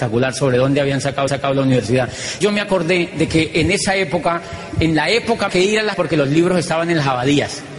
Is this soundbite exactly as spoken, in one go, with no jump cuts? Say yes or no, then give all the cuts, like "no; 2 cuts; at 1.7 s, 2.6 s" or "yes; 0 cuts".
no; 4 cuts; at 1.3 s, 2.4 s, 5.5 s, 5.9 s